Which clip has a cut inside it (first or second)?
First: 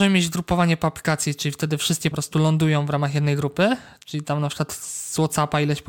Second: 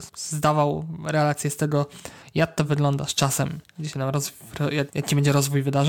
first